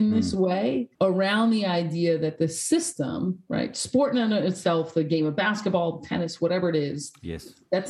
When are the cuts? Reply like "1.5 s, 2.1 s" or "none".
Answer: 0.9 s